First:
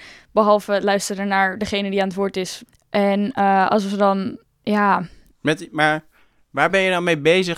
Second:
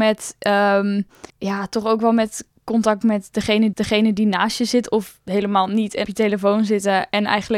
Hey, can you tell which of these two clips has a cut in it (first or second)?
second